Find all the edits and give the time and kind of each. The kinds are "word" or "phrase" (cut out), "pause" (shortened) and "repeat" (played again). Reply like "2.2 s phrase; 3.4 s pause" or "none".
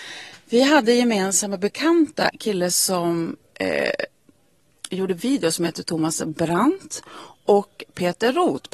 2.3 s word